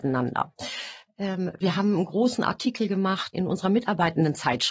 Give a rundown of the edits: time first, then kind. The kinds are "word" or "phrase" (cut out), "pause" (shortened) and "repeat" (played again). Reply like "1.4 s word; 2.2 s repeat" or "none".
3.3 s word